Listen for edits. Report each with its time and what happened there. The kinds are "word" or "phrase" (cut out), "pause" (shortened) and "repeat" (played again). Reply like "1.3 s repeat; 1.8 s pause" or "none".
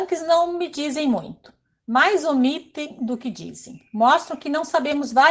none